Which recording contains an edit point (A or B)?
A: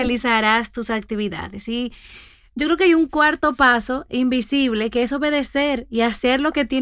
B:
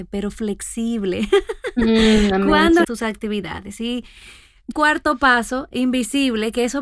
B